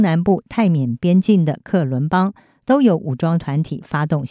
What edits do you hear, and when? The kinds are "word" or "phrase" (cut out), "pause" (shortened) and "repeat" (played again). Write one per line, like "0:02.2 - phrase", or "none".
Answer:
none